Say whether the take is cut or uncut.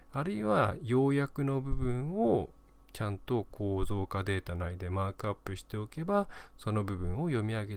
uncut